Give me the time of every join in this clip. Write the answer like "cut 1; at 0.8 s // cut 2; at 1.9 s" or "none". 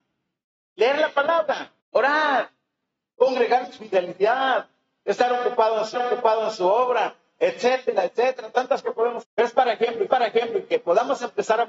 cut 1; at 1.8 s // cut 2; at 3.8 s // cut 3; at 5.9 s // cut 4; at 8.8 s // cut 5; at 9.2 s // cut 6; at 10.1 s